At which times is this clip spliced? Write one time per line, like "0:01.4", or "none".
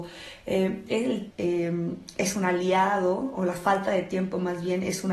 0:01.3